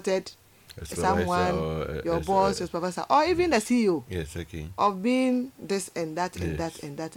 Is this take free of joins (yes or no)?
yes